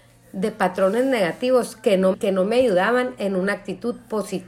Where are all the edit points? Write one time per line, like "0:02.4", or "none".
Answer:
0:02.1